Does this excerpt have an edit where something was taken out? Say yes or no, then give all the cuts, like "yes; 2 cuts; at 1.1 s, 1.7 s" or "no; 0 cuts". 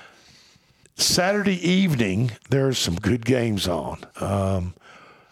yes; 1 cut; at 4.1 s